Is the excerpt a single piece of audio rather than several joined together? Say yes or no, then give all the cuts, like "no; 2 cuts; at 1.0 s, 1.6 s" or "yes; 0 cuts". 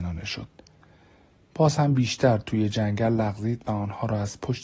yes; 0 cuts